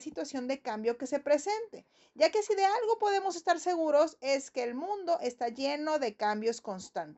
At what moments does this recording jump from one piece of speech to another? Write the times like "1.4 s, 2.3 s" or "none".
none